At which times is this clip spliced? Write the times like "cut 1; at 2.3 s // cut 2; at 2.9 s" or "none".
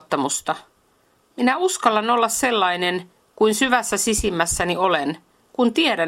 none

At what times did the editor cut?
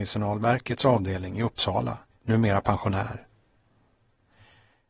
cut 1; at 2.1 s

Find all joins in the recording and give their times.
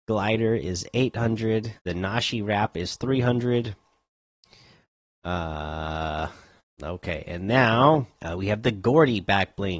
cut 1; at 1.8 s // cut 2; at 6.6 s // cut 3; at 8.1 s

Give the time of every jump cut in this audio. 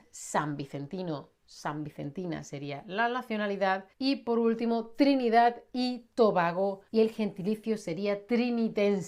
cut 1; at 3.9 s // cut 2; at 6.9 s

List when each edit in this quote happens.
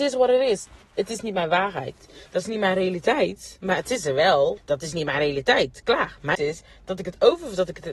cut 1; at 4.6 s // cut 2; at 6.3 s

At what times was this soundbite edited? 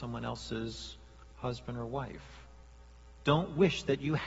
none

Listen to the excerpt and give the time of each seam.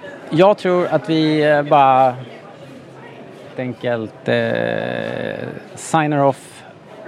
cut 1; at 3.5 s

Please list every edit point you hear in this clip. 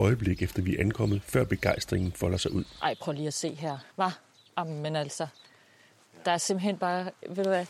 cut 1; at 3.9 s

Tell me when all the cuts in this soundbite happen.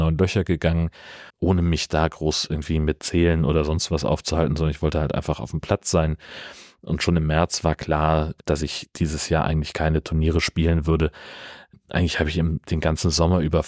cut 1; at 1.3 s

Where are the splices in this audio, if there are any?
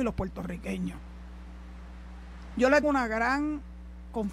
cut 1; at 2.8 s

